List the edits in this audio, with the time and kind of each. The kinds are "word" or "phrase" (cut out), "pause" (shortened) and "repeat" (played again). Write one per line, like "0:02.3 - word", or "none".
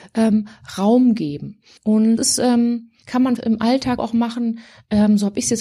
0:02.2 - word
0:03.4 - word
0:04.0 - word